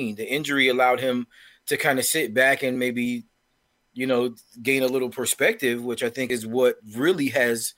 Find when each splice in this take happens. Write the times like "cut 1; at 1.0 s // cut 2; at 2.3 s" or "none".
none

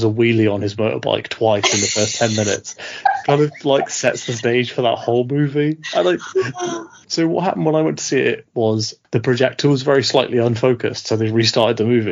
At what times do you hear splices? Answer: cut 1; at 7.0 s

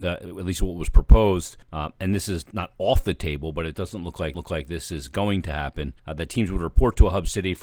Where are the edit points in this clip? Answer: cut 1; at 1.6 s // cut 2; at 4.3 s // cut 3; at 6.0 s

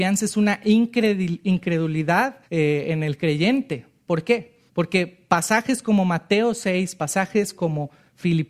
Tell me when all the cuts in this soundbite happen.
cut 1; at 2.4 s // cut 2; at 4.7 s

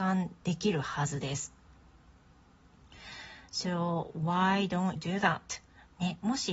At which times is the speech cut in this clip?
cut 1; at 5.0 s

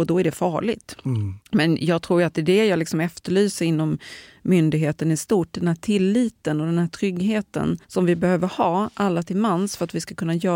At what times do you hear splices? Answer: cut 1; at 1.4 s // cut 2; at 7.8 s

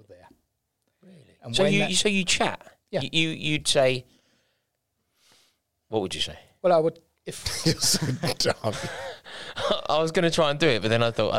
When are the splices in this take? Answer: none

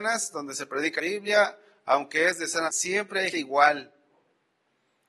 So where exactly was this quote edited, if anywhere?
cut 1; at 1.0 s // cut 2; at 2.7 s // cut 3; at 3.3 s

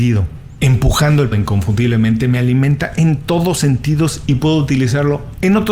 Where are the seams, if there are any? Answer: cut 1; at 1.3 s

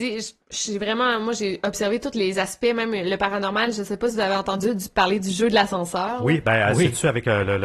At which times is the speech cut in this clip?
none

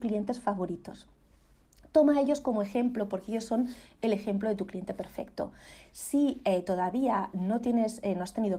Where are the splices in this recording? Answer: none

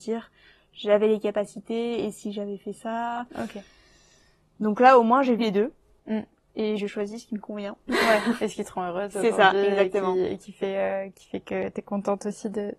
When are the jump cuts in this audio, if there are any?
cut 1; at 5.4 s

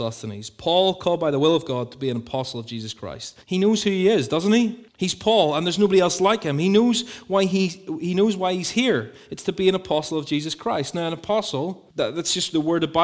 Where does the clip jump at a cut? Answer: cut 1; at 3.4 s // cut 2; at 4.9 s // cut 3; at 11.9 s

